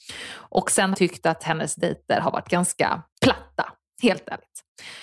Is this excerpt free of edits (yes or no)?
no